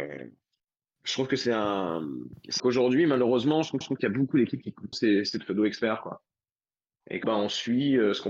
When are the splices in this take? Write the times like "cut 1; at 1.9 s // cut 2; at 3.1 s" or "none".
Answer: cut 1; at 2.6 s // cut 2; at 3.8 s // cut 3; at 4.9 s // cut 4; at 7.2 s